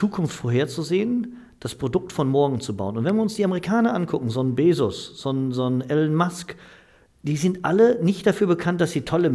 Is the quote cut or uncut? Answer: uncut